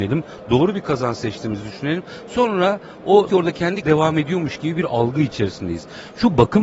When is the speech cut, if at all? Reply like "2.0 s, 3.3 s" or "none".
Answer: 3.3 s, 3.8 s